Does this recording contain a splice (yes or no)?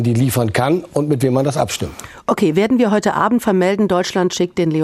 no